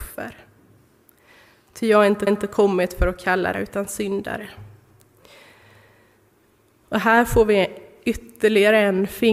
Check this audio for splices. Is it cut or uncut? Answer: cut